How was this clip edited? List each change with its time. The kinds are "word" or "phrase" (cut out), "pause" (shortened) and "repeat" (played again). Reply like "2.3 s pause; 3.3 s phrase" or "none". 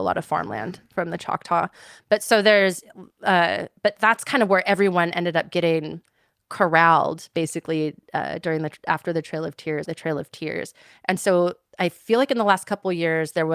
9.8 s phrase